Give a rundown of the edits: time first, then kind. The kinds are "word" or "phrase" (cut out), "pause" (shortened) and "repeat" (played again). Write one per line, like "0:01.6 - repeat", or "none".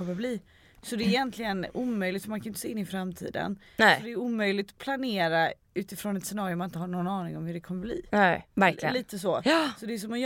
0:08.5 - pause